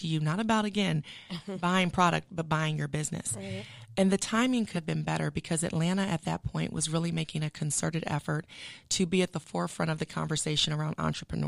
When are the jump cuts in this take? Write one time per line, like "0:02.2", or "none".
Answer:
0:04.7